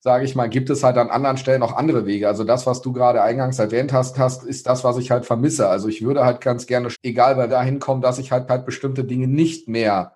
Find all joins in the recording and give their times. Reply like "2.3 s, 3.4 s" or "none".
1.6 s, 4.1 s, 6.9 s, 7.5 s, 8.5 s